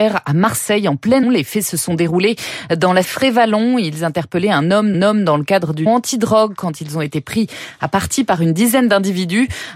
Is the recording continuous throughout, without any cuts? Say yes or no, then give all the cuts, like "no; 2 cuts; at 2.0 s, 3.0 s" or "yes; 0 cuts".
no; 4 cuts; at 1.2 s, 3.0 s, 4.9 s, 5.9 s